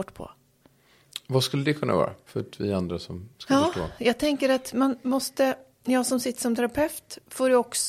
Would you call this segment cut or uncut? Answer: uncut